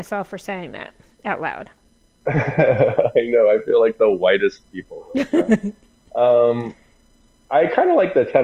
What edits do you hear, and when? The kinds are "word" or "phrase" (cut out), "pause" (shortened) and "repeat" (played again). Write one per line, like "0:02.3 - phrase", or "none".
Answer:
none